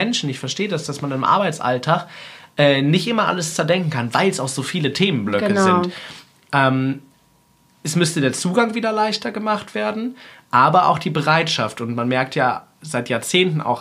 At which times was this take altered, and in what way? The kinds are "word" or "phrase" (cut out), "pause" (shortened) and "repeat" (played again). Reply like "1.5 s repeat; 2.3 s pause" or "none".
none